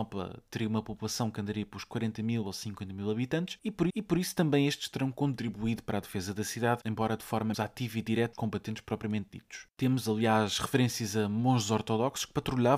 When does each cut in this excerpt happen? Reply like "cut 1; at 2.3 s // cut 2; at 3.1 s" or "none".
cut 1; at 3.9 s // cut 2; at 7.5 s // cut 3; at 8.3 s